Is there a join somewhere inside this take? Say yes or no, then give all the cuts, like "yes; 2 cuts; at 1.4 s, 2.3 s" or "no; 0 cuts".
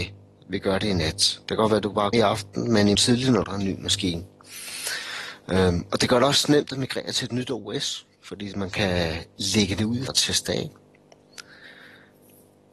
yes; 6 cuts; at 1.4 s, 2.1 s, 2.9 s, 3.4 s, 8.1 s, 10.1 s